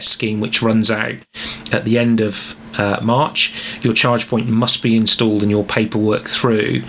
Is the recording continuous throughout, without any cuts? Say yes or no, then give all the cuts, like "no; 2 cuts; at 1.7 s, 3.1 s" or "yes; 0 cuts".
yes; 0 cuts